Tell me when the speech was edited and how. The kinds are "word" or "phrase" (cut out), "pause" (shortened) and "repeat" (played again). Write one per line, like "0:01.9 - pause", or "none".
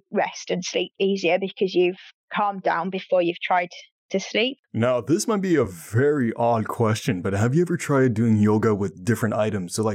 none